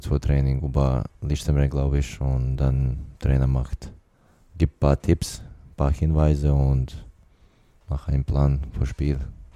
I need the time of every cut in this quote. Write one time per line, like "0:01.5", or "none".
none